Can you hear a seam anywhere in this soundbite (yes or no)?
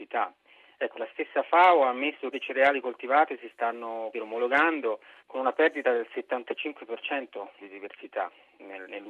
yes